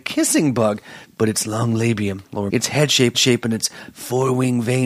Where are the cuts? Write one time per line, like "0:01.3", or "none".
0:02.5
0:03.1